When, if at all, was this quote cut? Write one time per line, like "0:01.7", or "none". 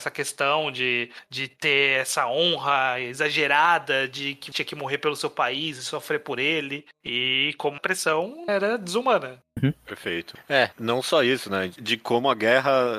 0:04.5
0:07.8
0:08.5
0:10.7